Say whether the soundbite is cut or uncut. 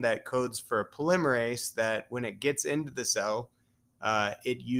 uncut